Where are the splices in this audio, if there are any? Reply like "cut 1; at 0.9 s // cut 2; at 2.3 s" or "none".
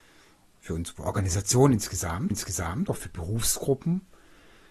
cut 1; at 2.3 s